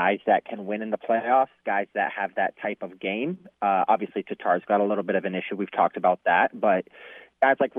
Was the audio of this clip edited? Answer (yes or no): no